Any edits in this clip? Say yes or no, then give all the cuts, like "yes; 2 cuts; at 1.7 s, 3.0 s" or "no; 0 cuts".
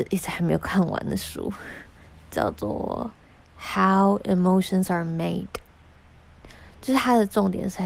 no; 0 cuts